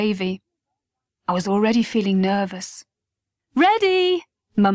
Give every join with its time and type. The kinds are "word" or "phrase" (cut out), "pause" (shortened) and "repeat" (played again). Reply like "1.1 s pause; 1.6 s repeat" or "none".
none